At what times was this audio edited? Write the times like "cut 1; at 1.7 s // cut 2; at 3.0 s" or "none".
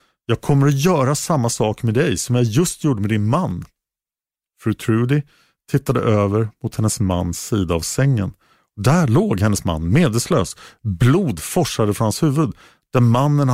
none